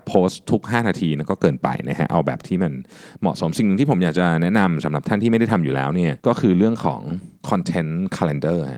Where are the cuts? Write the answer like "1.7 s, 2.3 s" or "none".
6.2 s, 7.4 s